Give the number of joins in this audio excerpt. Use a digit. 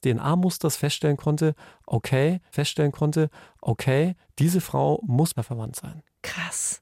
2